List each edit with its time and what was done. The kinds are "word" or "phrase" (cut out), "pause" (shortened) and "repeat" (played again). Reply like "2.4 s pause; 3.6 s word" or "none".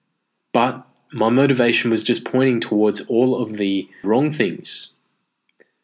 4.0 s word